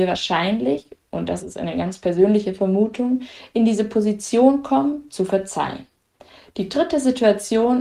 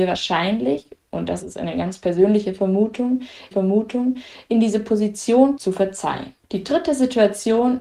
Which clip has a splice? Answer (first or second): second